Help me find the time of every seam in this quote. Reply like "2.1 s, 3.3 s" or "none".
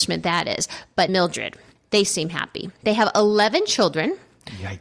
1.1 s